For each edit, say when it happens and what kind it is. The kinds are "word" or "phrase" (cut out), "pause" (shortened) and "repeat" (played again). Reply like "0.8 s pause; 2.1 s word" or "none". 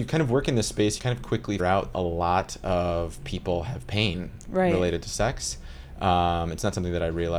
1.0 s word; 1.6 s word; 1.9 s word